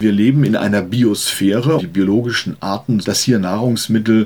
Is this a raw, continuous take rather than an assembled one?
no; 2 cuts; at 1.8 s, 3.0 s

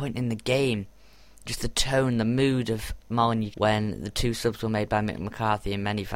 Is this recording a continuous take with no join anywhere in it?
no; 2 cuts; at 1.5 s, 3.5 s

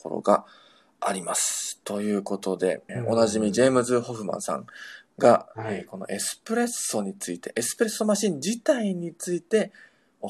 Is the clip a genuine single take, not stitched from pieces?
no; 1 cut; at 2.9 s

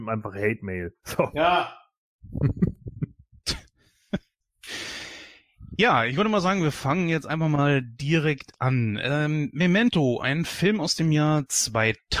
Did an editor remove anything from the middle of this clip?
yes; 1 cut; at 1.0 s

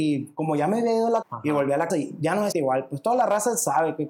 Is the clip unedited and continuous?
no; 3 cuts; at 1.2 s, 1.9 s, 2.5 s

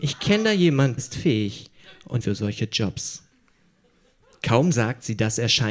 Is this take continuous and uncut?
no; 2 cuts; at 1.0 s, 2.2 s

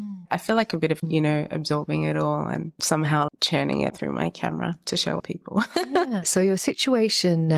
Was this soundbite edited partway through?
yes; 4 cuts; at 1.0 s, 3.3 s, 3.9 s, 5.2 s

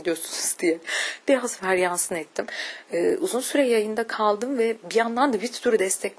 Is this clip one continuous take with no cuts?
yes; 0 cuts

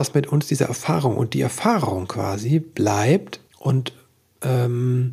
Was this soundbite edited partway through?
yes; 1 cut; at 3.5 s

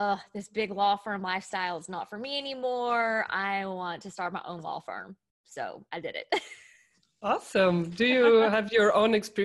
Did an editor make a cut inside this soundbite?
no; 0 cuts

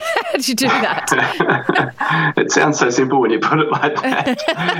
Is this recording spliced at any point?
no; 0 cuts

